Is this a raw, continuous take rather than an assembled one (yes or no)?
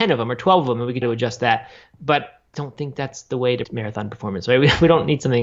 no